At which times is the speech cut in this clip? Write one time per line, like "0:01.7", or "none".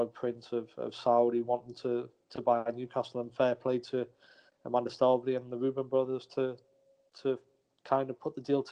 none